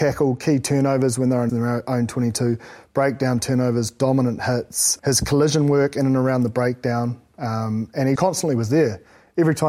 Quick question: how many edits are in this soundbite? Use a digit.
3